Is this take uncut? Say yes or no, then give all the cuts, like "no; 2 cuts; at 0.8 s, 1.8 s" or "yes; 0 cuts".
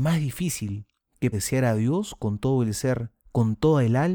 no; 2 cuts; at 1.3 s, 3.2 s